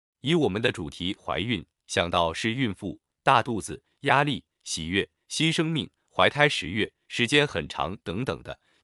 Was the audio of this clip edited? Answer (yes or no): no